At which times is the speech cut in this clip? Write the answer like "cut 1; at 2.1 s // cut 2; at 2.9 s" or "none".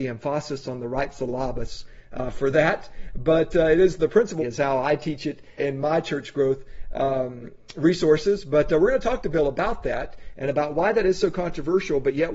cut 1; at 4.4 s // cut 2; at 5.6 s